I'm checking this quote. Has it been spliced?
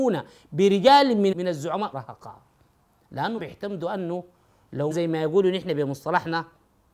yes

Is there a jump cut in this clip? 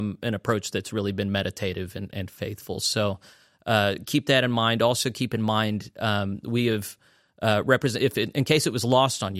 no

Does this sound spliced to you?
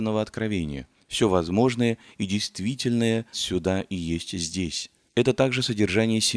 yes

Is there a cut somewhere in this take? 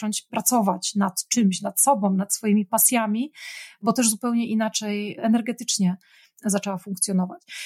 no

